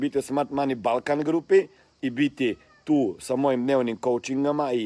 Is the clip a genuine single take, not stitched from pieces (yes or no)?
yes